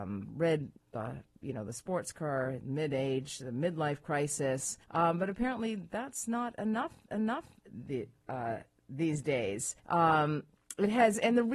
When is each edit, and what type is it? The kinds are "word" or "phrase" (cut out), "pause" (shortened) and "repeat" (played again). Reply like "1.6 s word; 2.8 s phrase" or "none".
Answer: 4.8 s pause; 7.1 s repeat; 9.8 s pause